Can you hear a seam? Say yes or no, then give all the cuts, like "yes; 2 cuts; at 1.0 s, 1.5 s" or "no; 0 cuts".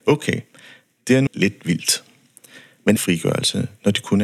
yes; 2 cuts; at 1.3 s, 3.0 s